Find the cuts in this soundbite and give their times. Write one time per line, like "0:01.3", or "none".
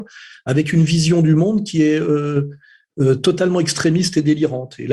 none